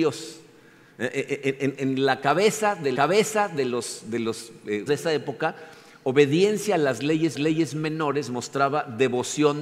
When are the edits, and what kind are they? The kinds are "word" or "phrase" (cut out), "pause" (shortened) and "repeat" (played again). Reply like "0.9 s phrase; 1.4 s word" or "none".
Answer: 1.7 s word; 2.9 s repeat; 4.9 s word; 7.3 s repeat